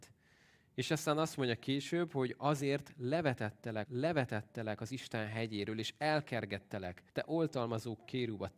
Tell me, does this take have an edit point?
yes; 2 cuts; at 3.9 s, 7.1 s

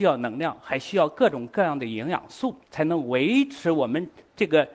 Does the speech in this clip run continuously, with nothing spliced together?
no; 1 cut; at 2.6 s

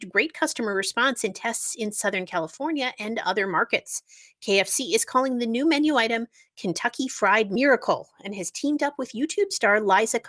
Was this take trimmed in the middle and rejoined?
no; 0 cuts

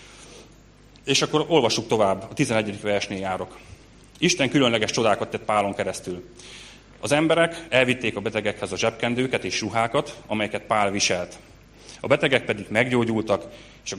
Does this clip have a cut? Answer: no; 0 cuts

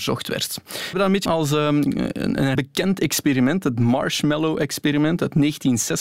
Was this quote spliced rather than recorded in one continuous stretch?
yes; 3 cuts; at 0.9 s, 1.3 s, 2.6 s

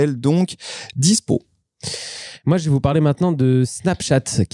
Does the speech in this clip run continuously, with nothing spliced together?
yes; 0 cuts

